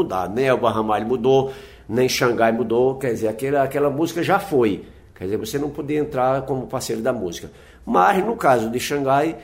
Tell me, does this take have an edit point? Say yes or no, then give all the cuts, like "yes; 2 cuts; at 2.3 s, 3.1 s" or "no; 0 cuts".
no; 0 cuts